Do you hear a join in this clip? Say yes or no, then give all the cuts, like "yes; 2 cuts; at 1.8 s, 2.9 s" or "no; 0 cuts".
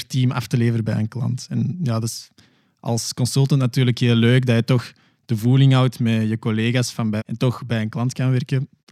yes; 1 cut; at 7.2 s